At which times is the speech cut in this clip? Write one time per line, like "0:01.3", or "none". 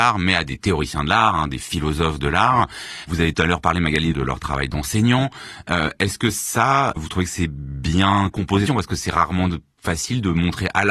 0:03.3
0:04.1
0:07.0
0:08.7